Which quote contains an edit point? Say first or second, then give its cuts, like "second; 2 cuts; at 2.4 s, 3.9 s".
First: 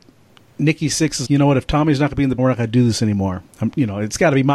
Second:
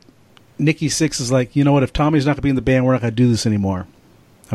first; 3 cuts; at 1.2 s, 2.4 s, 3.5 s